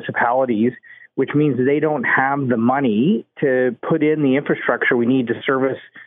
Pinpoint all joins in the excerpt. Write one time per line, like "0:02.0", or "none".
0:03.8